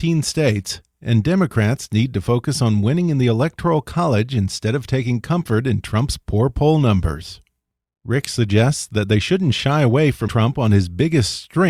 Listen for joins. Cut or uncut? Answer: cut